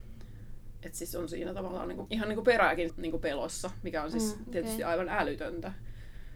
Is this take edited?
yes; 1 cut; at 2.9 s

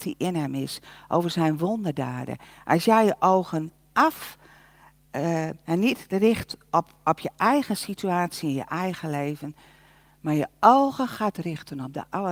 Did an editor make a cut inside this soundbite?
no; 0 cuts

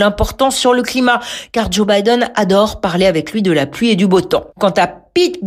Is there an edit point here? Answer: yes; 1 cut; at 4.5 s

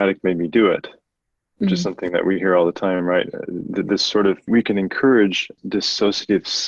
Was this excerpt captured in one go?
yes; 0 cuts

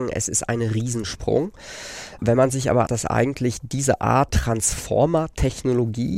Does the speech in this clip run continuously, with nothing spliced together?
no; 2 cuts; at 2.9 s, 4.3 s

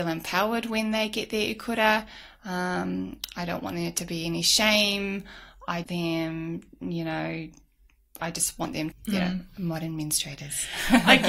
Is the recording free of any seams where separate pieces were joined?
no; 3 cuts; at 5.8 s, 8.2 s, 8.9 s

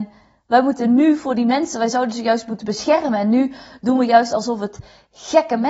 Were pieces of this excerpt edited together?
no; 0 cuts

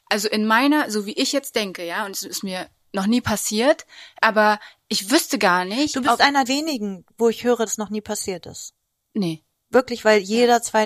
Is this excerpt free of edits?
no; 3 cuts; at 4.2 s, 6.5 s, 7.7 s

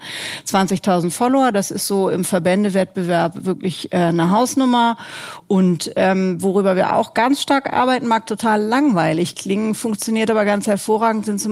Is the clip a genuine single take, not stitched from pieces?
yes; 0 cuts

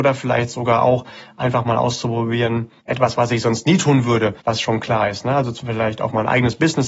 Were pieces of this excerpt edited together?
yes; 2 cuts; at 2.8 s, 4.4 s

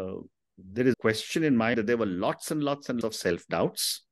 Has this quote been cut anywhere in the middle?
yes; 3 cuts; at 0.9 s, 1.7 s, 3.0 s

